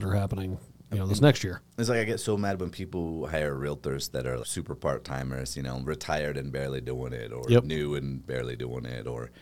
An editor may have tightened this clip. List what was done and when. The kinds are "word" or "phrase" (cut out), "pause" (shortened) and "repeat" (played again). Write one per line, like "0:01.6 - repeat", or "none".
0:04.4 - word